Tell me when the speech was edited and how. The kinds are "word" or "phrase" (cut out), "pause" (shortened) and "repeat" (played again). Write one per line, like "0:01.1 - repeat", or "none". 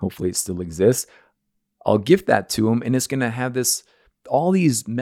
none